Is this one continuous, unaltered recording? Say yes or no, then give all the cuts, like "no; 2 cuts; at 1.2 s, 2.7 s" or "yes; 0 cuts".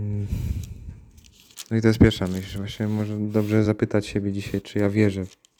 yes; 0 cuts